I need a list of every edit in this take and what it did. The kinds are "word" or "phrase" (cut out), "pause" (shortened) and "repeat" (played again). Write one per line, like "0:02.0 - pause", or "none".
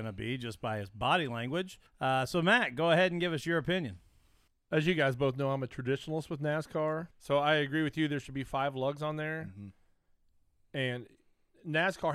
0:01.9 - pause
0:04.5 - pause
0:07.1 - pause